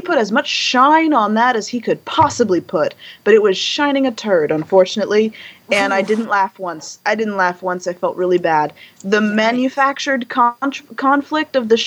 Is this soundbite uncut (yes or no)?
yes